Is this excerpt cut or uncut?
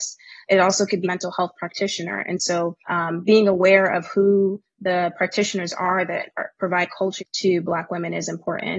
cut